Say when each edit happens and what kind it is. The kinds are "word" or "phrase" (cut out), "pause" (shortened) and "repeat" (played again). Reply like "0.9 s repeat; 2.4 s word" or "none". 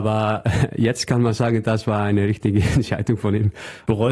none